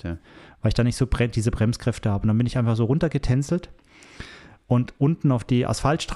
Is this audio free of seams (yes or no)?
yes